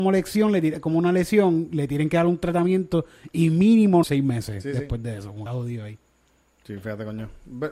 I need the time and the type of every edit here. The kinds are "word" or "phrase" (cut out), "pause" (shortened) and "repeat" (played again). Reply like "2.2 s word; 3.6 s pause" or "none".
4.0 s phrase; 5.5 s word